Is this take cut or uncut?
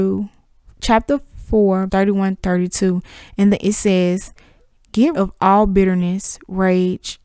cut